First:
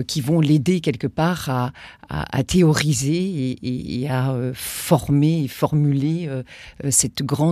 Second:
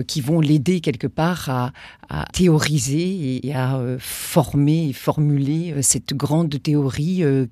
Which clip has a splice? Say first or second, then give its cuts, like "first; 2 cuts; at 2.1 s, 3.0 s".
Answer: second; 3 cuts; at 2.3 s, 3.4 s, 5.7 s